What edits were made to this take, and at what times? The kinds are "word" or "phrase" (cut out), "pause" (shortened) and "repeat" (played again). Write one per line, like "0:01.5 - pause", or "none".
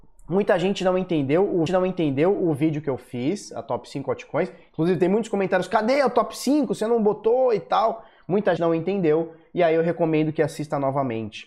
0:01.7 - repeat
0:08.6 - word